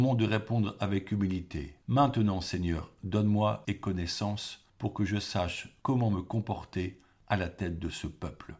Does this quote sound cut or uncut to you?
cut